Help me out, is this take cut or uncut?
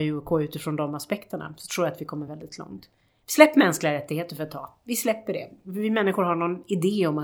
uncut